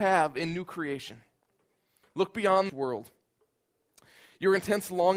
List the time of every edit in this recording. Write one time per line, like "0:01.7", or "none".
0:02.7